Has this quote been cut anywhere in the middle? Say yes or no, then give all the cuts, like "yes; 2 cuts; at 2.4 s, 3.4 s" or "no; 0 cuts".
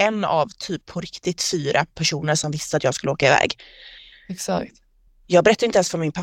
no; 0 cuts